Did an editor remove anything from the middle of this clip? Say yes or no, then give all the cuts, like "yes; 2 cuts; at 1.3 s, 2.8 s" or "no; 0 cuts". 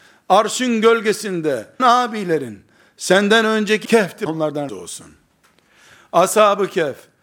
yes; 4 cuts; at 1.8 s, 3.8 s, 4.3 s, 4.7 s